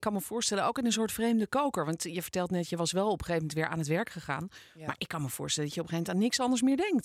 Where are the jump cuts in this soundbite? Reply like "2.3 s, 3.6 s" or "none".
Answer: none